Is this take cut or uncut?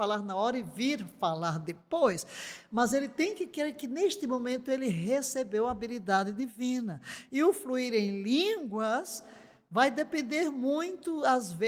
uncut